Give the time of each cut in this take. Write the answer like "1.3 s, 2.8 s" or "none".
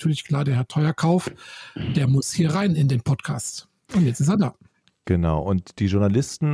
none